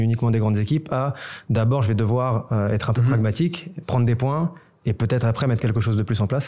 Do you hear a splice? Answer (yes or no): no